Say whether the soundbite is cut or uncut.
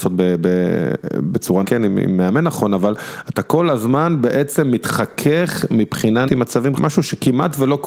cut